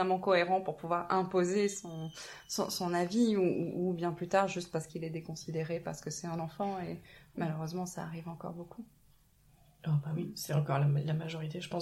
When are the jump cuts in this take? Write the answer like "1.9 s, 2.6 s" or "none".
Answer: none

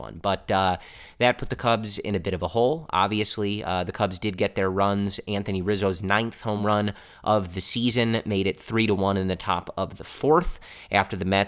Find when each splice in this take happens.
none

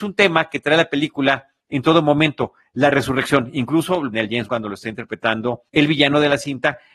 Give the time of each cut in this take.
4.1 s, 4.5 s, 5.7 s

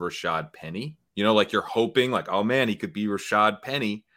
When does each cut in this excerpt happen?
1.1 s

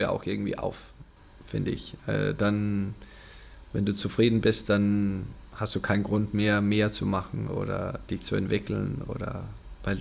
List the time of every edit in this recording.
none

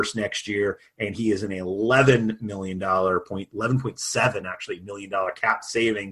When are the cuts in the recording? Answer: none

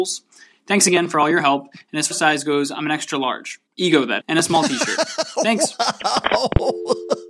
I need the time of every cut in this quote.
2.1 s, 3.7 s, 4.2 s

